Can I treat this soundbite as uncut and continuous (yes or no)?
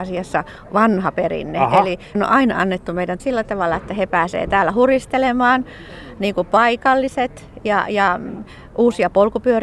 no